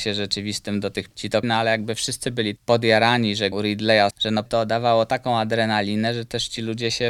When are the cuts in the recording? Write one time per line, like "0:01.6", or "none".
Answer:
0:01.1
0:01.4
0:02.6
0:03.5
0:04.1
0:04.5